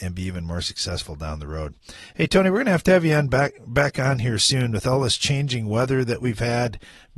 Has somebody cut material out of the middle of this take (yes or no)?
no